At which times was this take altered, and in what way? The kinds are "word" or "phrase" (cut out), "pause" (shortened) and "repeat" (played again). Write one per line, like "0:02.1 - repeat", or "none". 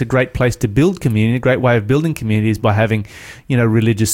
none